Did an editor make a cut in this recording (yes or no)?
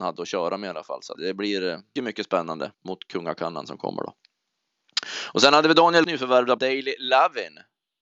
yes